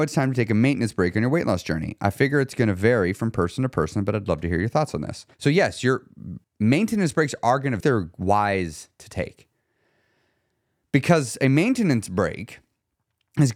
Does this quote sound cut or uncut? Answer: cut